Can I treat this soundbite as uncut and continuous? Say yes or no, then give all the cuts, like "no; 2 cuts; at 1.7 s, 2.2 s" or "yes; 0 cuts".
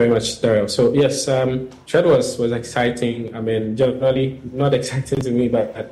yes; 0 cuts